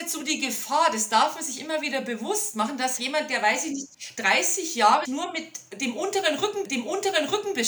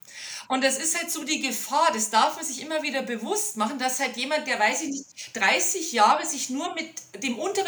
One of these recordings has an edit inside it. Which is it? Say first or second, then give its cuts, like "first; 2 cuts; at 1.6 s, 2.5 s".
first; 3 cuts; at 3.0 s, 5.0 s, 6.6 s